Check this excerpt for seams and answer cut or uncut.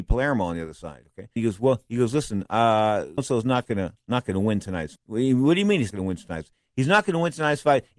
cut